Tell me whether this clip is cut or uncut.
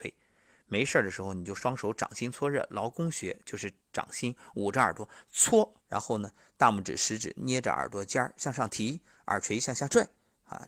cut